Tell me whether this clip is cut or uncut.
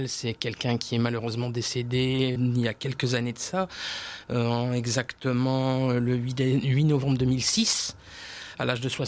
cut